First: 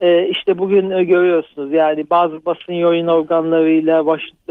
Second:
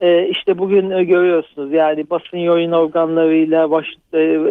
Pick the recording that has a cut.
second; 1 cut; at 2.1 s

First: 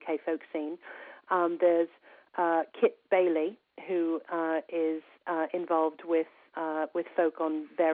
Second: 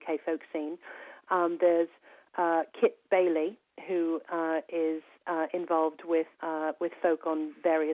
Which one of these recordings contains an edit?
second; 1 cut; at 6.3 s

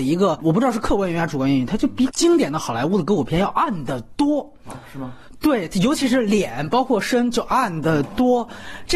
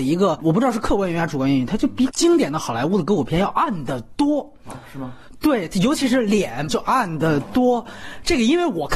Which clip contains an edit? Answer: second; 1 cut; at 6.7 s

